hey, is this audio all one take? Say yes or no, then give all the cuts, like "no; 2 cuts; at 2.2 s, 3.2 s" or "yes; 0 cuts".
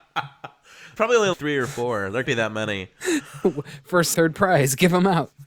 no; 4 cuts; at 1.0 s, 1.3 s, 2.2 s, 4.1 s